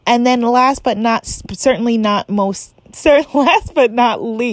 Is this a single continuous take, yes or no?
yes